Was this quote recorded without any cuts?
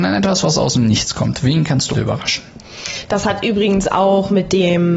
no; 1 cut; at 1.9 s

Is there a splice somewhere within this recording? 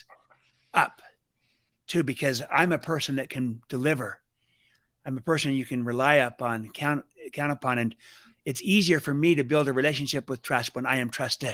no; 0 cuts

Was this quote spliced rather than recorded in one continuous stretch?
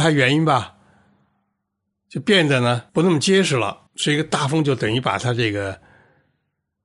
yes; 2 cuts; at 2.9 s, 3.9 s

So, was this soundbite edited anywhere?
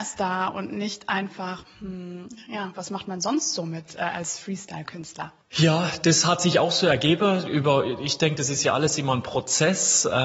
yes; 1 cut; at 5.4 s

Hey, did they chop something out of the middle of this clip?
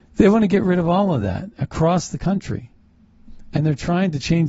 no; 0 cuts

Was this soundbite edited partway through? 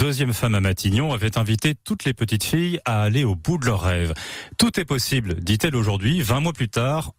no; 0 cuts

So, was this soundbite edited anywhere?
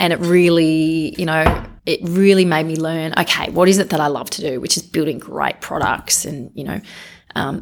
yes; 1 cut; at 1.8 s

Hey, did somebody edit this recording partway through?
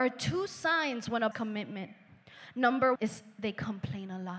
yes; 2 cuts; at 1.3 s, 3.0 s

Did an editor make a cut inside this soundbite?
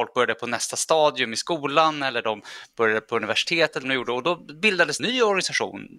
yes; 2 cuts; at 3.8 s, 5.0 s

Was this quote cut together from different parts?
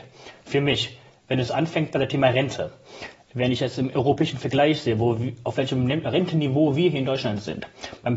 no; 0 cuts

